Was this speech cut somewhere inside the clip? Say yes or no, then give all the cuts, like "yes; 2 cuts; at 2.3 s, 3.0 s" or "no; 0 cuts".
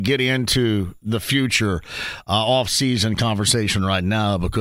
no; 0 cuts